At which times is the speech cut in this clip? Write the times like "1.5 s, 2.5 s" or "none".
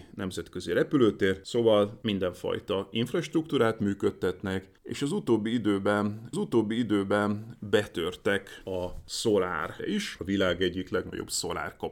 4.8 s, 6.3 s, 9.8 s